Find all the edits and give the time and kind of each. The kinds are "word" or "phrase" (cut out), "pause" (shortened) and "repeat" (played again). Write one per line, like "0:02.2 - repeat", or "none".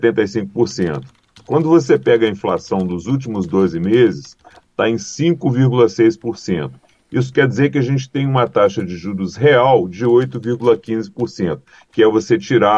none